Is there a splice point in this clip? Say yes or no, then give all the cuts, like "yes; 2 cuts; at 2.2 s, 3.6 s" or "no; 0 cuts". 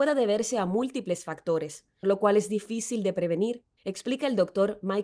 yes; 1 cut; at 2.0 s